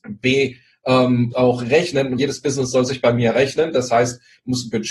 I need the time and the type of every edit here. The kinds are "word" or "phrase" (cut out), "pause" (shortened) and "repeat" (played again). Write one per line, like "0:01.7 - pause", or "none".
0:01.3 - word
0:02.2 - word